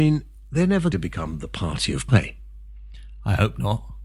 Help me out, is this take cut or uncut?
cut